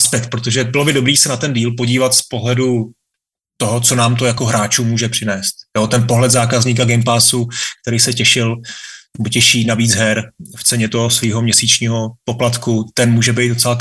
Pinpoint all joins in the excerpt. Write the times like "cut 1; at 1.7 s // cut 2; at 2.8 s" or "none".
none